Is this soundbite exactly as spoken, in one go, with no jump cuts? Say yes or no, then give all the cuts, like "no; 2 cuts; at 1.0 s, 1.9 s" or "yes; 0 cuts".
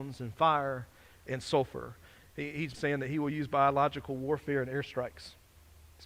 no; 1 cut; at 2.7 s